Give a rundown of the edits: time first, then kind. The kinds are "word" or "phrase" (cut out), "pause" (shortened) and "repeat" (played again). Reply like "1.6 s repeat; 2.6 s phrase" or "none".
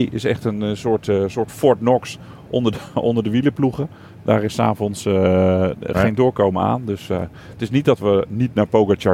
none